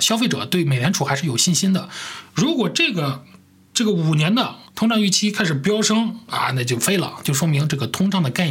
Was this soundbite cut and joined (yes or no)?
yes